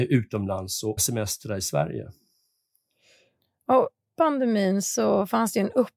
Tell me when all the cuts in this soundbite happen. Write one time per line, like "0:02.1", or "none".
0:01.0
0:04.1